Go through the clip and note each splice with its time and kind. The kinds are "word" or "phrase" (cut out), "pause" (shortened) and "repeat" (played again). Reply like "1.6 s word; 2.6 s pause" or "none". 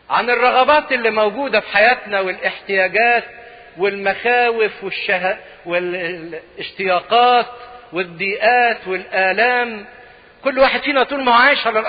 none